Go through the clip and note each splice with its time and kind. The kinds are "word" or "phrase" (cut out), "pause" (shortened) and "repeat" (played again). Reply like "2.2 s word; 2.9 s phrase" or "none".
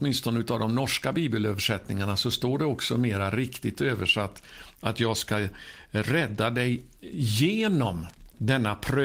none

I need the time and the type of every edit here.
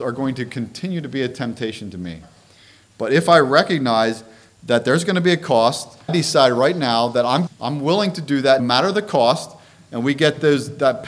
6.1 s phrase; 7.5 s phrase; 8.6 s word

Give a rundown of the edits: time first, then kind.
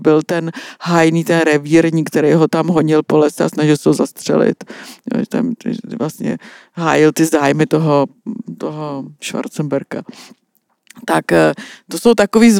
none

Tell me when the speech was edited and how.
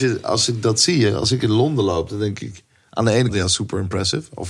3.3 s word

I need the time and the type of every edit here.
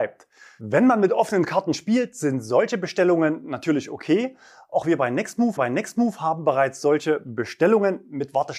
5.6 s repeat

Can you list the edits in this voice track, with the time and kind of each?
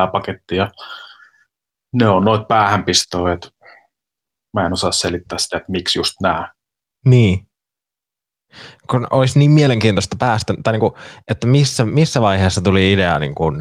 none

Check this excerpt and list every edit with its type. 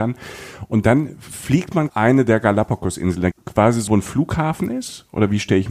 1.9 s phrase; 3.3 s word; 3.9 s phrase

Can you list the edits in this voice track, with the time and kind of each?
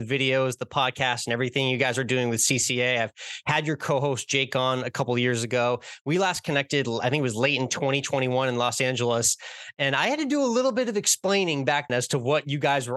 11.9 s word

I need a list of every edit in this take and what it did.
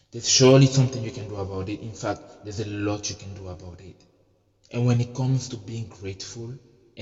none

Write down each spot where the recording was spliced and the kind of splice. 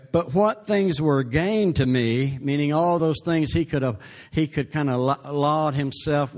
none

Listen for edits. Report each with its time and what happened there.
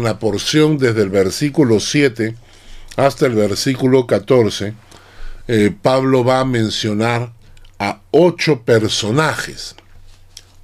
none

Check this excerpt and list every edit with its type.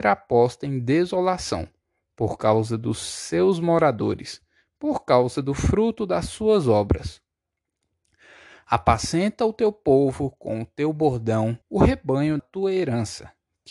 11.6 s pause; 12.4 s word

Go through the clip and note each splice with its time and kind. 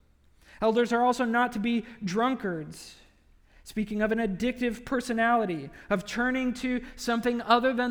none

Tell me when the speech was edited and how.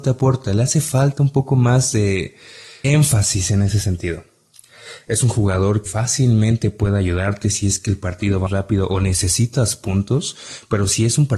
2.8 s word; 5.9 s word; 8.5 s word

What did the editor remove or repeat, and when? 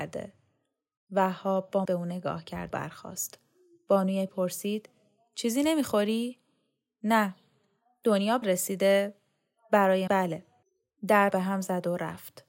1.8 s word; 2.7 s word; 4.3 s word; 8.4 s word; 10.1 s word; 11.3 s word

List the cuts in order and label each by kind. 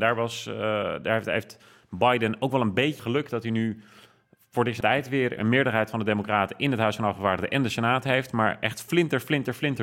3.0 s word; 4.8 s word

